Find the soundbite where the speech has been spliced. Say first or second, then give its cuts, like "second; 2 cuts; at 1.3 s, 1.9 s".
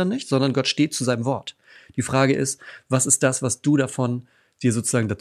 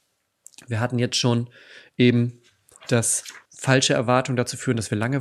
second; 1 cut; at 3.4 s